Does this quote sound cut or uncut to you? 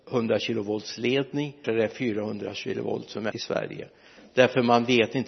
cut